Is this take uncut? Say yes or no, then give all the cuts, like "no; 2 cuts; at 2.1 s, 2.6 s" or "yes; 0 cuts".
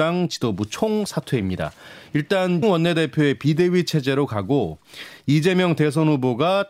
no; 1 cut; at 2.6 s